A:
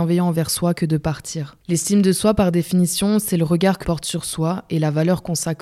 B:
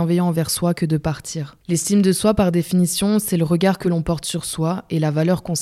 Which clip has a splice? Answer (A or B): A